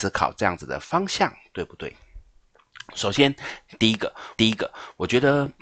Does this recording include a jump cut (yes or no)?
yes